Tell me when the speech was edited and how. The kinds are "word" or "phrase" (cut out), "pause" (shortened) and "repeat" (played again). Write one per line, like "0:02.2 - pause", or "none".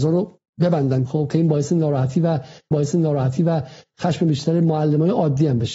0:01.1 - word
0:02.7 - repeat